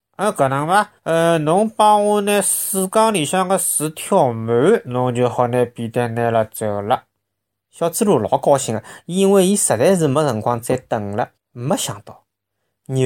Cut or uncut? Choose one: cut